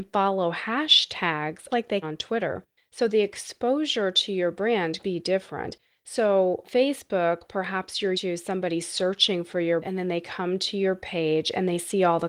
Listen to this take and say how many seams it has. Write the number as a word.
six